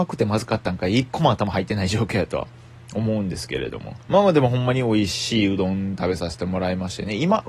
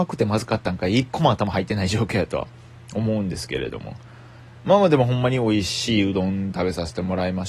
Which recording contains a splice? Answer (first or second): first